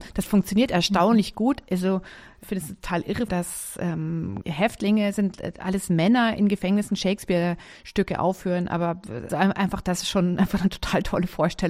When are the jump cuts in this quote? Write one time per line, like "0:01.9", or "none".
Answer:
0:03.3
0:04.4
0:09.3

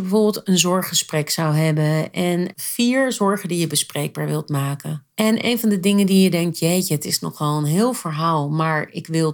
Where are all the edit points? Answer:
0:02.5
0:05.1

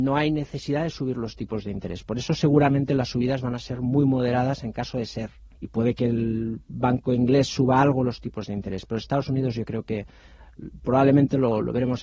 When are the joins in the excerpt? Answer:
0:05.5

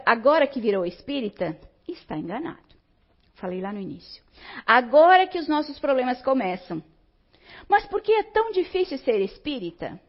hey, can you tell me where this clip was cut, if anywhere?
none

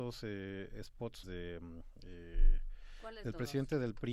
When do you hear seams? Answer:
0:01.2

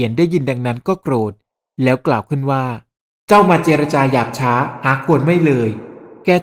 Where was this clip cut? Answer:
none

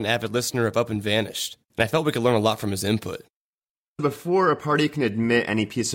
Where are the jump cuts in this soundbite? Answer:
none

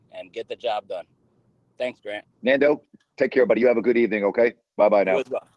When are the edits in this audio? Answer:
none

